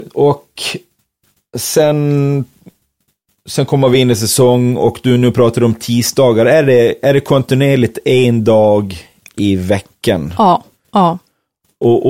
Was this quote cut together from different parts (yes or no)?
no